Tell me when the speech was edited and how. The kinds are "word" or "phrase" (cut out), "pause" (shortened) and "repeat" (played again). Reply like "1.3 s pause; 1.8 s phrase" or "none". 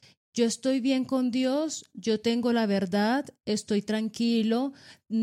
none